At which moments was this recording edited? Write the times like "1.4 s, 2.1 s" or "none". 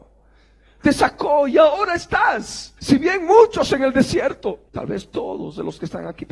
2.8 s, 4.7 s